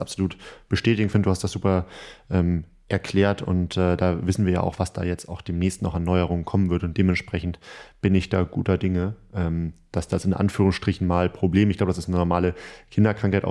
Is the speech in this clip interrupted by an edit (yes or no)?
no